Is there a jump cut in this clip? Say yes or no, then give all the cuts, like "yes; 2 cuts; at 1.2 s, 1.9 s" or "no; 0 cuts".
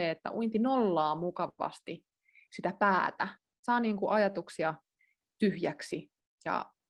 no; 0 cuts